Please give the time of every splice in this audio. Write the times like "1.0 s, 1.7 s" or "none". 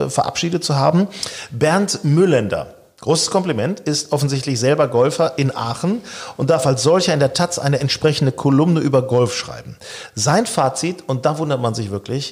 none